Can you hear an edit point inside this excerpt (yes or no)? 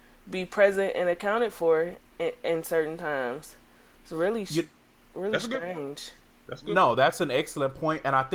no